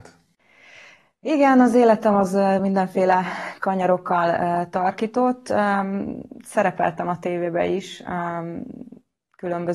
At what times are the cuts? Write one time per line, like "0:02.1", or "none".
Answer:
none